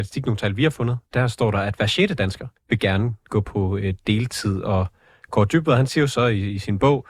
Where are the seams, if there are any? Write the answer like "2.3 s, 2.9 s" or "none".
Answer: 1.1 s, 2.6 s